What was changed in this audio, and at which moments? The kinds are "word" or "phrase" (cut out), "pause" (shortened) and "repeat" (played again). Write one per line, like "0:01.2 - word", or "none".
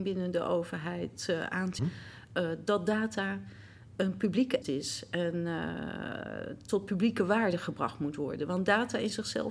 0:01.8 - phrase
0:04.6 - word